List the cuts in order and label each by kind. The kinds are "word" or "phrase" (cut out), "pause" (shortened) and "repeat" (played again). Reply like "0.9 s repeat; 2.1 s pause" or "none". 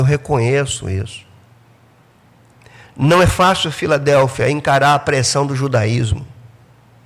none